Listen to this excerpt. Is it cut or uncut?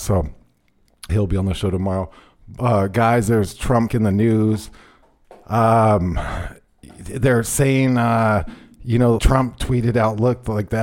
cut